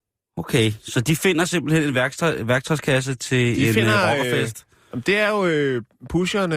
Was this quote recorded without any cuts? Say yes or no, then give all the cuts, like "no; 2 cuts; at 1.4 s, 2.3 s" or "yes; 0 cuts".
yes; 0 cuts